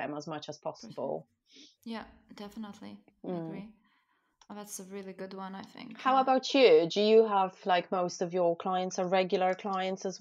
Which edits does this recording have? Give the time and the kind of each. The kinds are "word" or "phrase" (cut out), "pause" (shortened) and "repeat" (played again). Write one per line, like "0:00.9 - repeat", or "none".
none